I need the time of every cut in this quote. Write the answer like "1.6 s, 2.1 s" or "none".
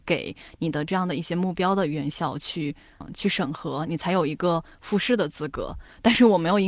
3.0 s